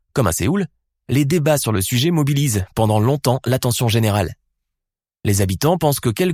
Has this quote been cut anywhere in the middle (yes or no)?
no